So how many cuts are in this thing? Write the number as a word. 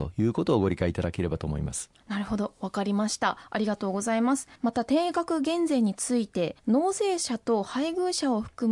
three